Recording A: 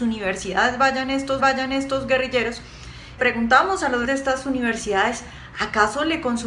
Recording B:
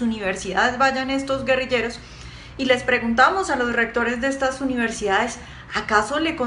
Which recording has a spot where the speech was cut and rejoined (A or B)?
A